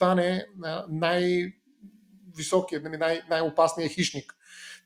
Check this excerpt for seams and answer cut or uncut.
uncut